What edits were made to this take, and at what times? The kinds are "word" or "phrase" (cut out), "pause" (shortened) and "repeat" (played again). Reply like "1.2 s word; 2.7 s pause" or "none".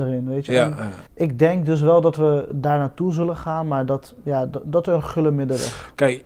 1.1 s pause